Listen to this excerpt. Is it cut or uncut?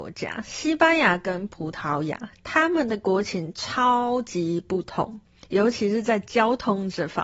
uncut